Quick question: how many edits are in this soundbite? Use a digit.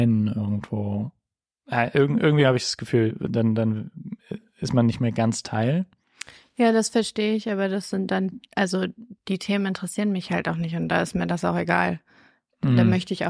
0